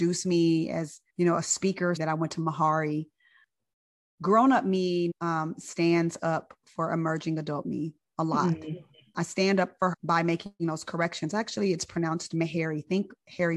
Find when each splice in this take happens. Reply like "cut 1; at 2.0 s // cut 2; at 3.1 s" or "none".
cut 1; at 1.1 s // cut 2; at 2.0 s // cut 3; at 5.1 s // cut 4; at 9.9 s